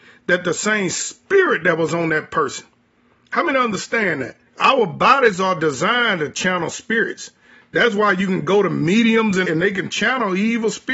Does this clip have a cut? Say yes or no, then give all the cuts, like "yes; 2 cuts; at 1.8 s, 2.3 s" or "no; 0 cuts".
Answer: yes; 2 cuts; at 4.5 s, 9.4 s